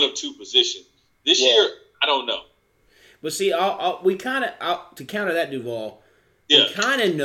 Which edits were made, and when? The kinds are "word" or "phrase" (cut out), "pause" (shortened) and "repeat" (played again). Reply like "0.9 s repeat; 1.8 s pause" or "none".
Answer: none